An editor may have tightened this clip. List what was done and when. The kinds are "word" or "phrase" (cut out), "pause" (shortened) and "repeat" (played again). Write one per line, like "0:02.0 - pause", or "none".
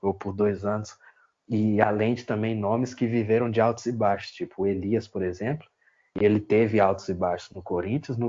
none